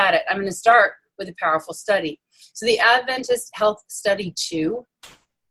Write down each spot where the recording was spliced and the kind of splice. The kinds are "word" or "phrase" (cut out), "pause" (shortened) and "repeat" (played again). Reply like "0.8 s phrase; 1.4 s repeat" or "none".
none